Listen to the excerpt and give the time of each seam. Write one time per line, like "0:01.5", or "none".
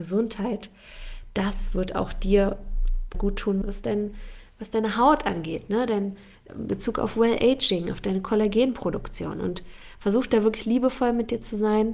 0:03.1
0:03.6
0:06.5